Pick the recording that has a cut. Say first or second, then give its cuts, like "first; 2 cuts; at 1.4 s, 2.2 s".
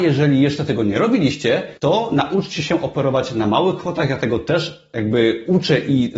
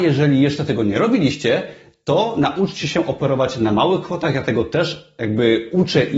first; 1 cut; at 1.8 s